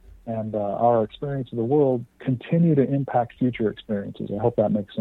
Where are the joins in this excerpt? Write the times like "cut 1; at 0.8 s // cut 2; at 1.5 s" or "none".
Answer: cut 1; at 2.1 s